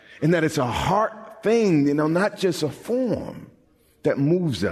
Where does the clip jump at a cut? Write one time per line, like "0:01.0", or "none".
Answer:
none